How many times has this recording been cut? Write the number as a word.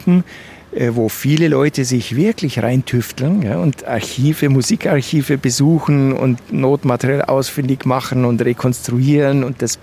zero